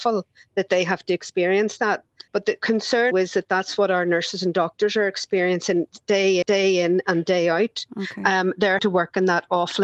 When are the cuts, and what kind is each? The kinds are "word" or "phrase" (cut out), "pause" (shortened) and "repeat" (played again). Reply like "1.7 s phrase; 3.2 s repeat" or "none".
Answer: 2.3 s pause; 3.1 s word; 6.4 s repeat; 8.8 s word

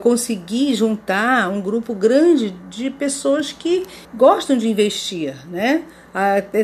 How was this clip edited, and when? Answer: 4.0 s pause

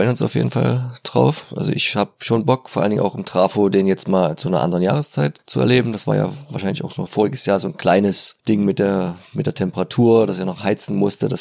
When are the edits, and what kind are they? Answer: 7.1 s word; 8.4 s pause

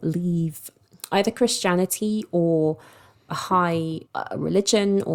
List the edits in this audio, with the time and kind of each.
3.3 s phrase; 4.1 s pause

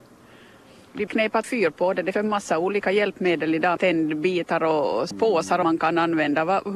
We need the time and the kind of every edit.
1.1 s word; 1.4 s word; 2.1 s word; 3.8 s word; 5.1 s word; 5.6 s word

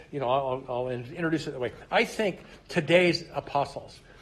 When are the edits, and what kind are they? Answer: none

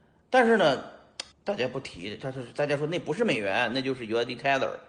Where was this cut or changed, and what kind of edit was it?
1.3 s pause

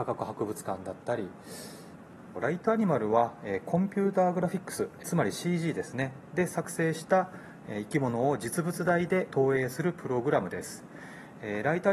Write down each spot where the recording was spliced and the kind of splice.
none

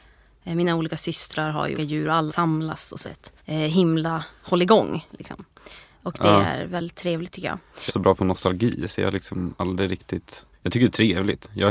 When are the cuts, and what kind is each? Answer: 1.8 s word; 2.3 s word; 3.0 s phrase; 3.4 s pause; 7.9 s phrase; 10.5 s pause

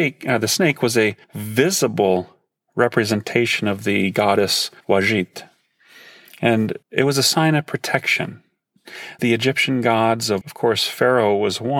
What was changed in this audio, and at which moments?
1.2 s pause; 4.8 s pause; 6.8 s pause; 9.2 s word; 10.4 s word

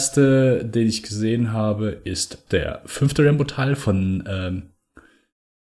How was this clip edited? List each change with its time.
2.5 s phrase

